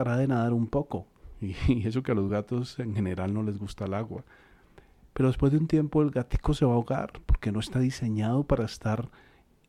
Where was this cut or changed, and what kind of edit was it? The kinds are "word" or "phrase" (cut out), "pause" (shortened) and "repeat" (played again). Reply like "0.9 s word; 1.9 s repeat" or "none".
none